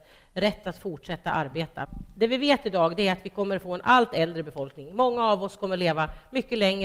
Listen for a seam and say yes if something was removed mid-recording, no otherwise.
no